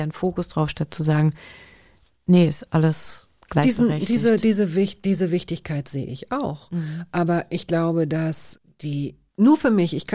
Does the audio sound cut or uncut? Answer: uncut